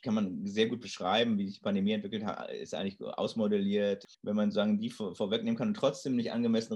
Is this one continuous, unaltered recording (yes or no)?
no